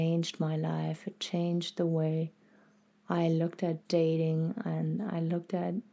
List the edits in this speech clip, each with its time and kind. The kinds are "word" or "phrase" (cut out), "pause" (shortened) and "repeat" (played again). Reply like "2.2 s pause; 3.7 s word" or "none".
none

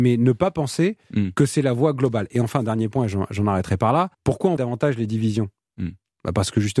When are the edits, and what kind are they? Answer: 4.1 s pause; 4.6 s word

